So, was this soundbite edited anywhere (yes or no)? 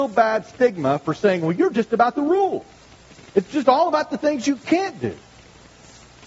yes